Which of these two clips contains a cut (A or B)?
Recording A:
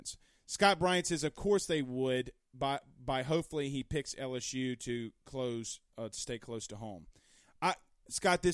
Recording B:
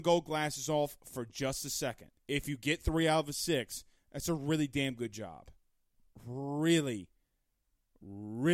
B